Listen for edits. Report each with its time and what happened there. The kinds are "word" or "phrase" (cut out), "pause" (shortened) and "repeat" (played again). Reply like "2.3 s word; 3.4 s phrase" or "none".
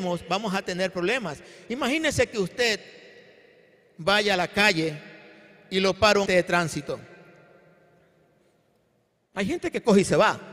6.3 s word